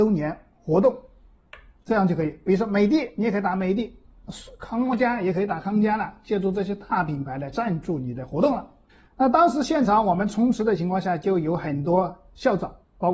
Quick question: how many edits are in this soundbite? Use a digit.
1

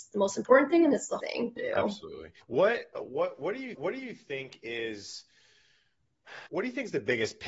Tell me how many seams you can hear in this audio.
5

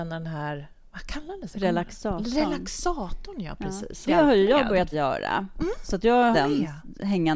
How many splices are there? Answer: 3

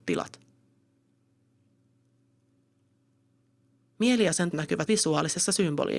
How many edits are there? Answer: 2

